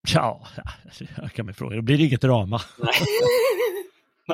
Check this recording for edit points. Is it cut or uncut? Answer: uncut